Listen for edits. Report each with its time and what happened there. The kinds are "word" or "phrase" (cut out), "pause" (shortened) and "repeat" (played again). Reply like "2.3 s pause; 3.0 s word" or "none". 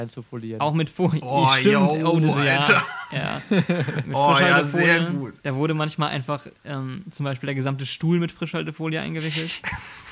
5.4 s pause; 6.6 s pause

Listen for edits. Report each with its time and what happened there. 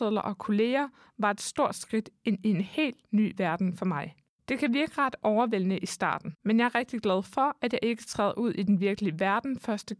6.4 s pause

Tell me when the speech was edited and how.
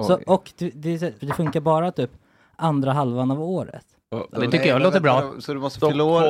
1.2 s word; 4.0 s pause; 4.3 s phrase

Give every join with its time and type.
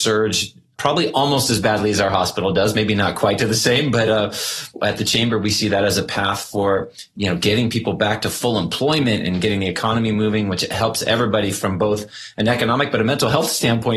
none

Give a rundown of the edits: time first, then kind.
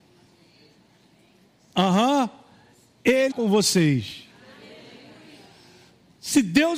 3.3 s word

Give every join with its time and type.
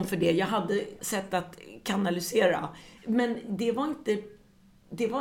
1.0 s word; 3.0 s pause

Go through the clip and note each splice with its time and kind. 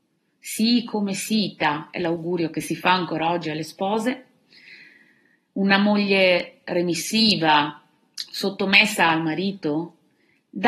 none

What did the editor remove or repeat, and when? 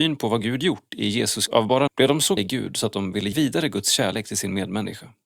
1.5 s word; 1.9 s word; 2.4 s word; 3.3 s word

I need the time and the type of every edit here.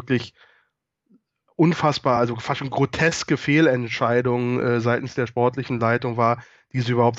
none

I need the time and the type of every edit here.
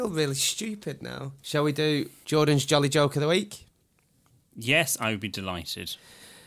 none

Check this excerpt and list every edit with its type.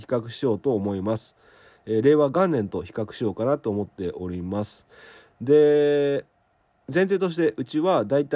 none

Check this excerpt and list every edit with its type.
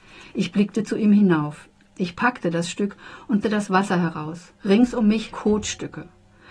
3.4 s word; 4.6 s pause; 5.3 s word

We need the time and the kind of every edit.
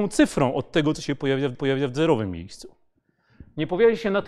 1.5 s repeat

